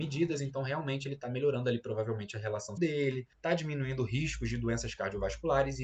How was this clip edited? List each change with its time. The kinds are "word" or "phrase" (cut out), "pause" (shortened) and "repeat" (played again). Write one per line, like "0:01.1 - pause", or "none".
0:02.8 - word
0:03.3 - pause

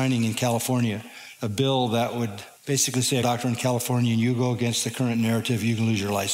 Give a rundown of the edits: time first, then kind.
0:02.6 - pause
0:03.2 - phrase

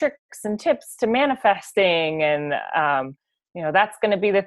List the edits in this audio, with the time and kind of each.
none

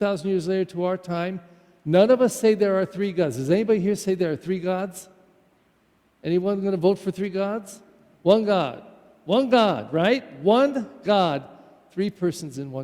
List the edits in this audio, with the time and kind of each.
none

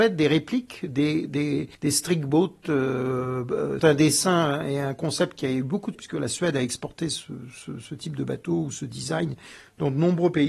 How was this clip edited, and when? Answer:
0:01.7 - pause
0:03.8 - phrase
0:05.9 - word

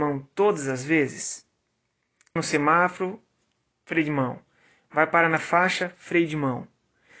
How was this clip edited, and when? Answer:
0:02.4 - word

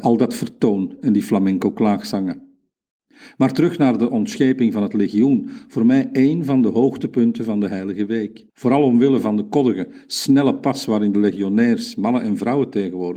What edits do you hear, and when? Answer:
0:08.5 - pause

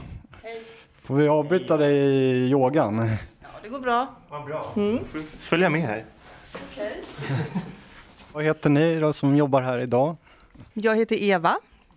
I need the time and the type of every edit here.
0:10.7 - pause

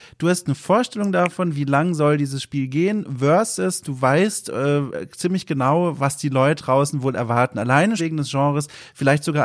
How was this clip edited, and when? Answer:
0:06.6 - word
0:08.0 - word

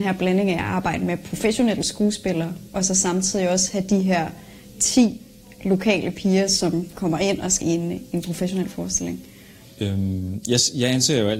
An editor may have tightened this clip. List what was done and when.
0:06.9 - word
0:07.6 - word

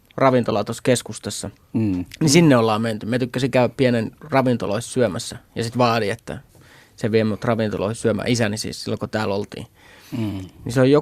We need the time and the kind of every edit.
none

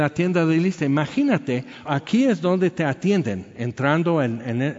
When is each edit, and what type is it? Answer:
0:01.9 - word

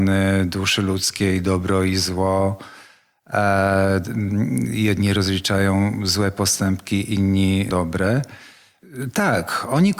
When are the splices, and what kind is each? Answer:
0:07.7 - word

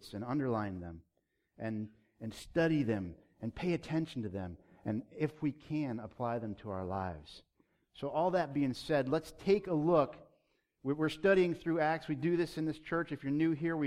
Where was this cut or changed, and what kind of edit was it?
none

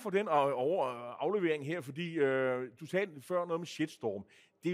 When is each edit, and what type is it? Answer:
none

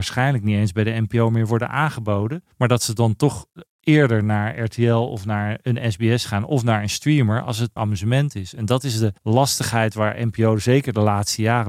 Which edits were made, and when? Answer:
0:02.5 - pause
0:07.8 - word
0:09.2 - pause

